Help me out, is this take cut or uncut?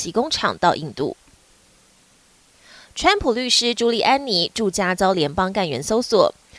uncut